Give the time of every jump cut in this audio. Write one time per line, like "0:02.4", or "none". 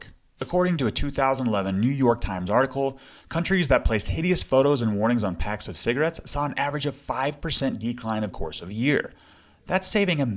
0:08.3